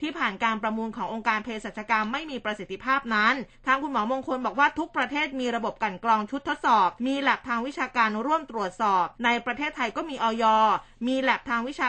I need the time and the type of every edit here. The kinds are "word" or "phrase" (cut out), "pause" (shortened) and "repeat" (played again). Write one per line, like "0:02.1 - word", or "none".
0:03.5 - pause
0:07.0 - pause
0:09.1 - pause